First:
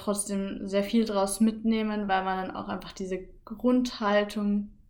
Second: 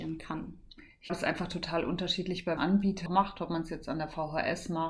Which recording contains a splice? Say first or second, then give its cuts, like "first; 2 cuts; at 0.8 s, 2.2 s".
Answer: second; 3 cuts; at 1.1 s, 2.6 s, 3.1 s